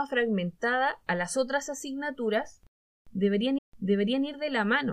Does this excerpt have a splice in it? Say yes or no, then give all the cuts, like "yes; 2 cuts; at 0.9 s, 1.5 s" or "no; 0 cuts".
yes; 1 cut; at 3.6 s